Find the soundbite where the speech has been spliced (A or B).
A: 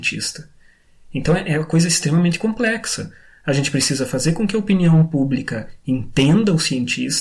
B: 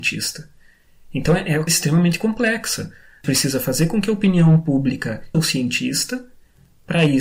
B